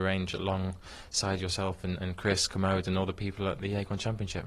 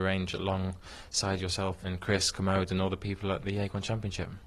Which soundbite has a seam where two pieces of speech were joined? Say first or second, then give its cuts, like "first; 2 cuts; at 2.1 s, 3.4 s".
second; 1 cut; at 1.8 s